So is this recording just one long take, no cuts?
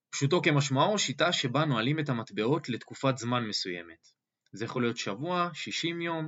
yes; 0 cuts

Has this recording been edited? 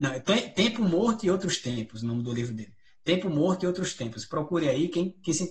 no; 0 cuts

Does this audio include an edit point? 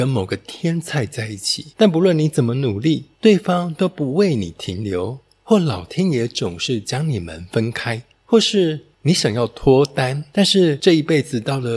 no; 0 cuts

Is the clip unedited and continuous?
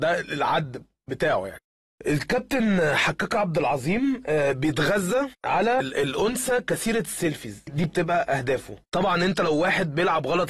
yes; 0 cuts

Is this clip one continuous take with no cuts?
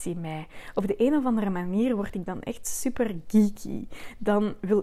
yes; 0 cuts

